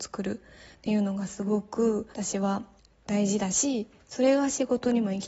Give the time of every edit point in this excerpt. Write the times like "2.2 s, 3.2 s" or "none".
2.1 s, 2.8 s